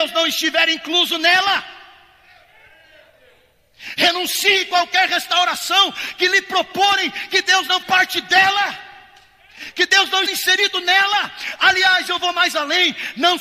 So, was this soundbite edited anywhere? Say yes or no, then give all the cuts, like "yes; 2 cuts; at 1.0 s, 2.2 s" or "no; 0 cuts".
yes; 2 cuts; at 7.8 s, 10.3 s